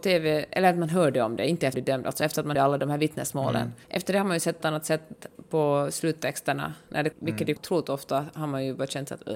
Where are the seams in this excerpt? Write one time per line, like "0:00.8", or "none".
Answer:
0:01.7
0:02.5
0:03.8
0:04.6
0:07.1
0:07.6

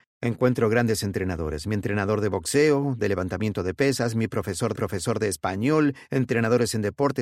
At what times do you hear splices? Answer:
0:04.7

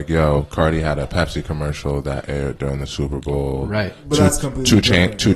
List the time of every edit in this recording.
none

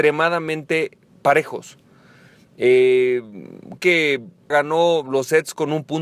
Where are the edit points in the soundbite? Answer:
0:03.8
0:04.5

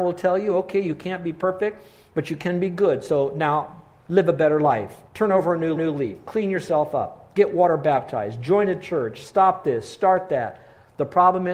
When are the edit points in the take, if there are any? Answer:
0:05.1
0:05.8

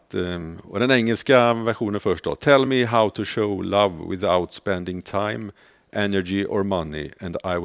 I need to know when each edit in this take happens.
none

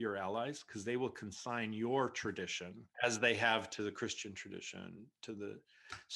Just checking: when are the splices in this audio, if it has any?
0:02.9

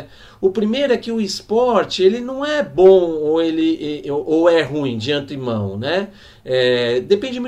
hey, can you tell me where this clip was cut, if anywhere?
none

